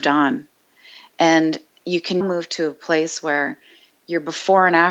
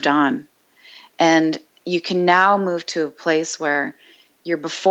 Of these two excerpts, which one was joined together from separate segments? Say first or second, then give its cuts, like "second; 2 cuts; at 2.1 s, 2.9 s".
first; 1 cut; at 2.2 s